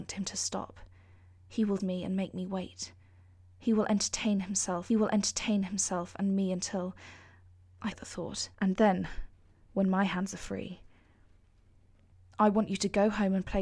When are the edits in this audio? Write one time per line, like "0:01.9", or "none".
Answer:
0:01.8
0:04.9
0:07.9
0:08.5